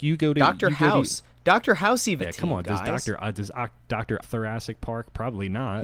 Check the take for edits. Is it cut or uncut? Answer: cut